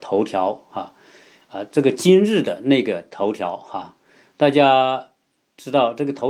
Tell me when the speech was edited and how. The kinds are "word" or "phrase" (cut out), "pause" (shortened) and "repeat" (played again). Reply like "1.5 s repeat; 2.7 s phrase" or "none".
none

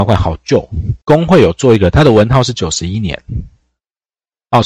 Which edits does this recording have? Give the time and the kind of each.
1.0 s pause

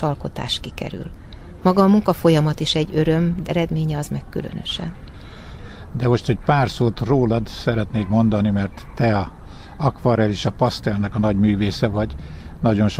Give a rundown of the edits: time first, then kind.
3.5 s word

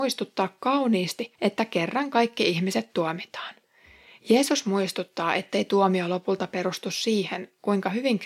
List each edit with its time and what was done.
1.4 s pause

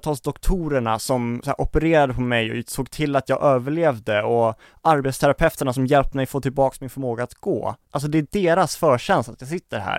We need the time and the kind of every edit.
none

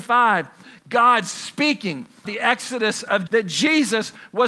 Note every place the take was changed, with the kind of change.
2.2 s word; 3.3 s word

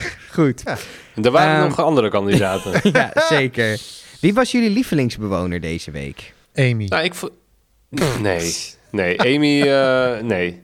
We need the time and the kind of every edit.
6.4 s pause

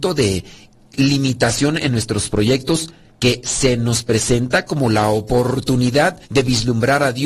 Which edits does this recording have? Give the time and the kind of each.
3.1 s pause; 6.2 s pause

